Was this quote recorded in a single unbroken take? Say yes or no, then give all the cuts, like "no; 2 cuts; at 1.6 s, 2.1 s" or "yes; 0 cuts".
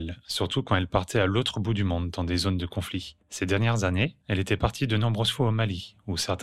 yes; 0 cuts